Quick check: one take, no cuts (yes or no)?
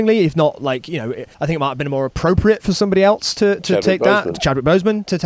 no